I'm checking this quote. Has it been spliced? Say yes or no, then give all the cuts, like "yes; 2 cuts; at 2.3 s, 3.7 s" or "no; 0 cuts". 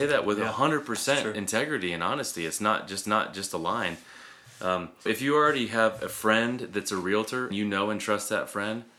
yes; 3 cuts; at 3.0 s, 5.1 s, 7.5 s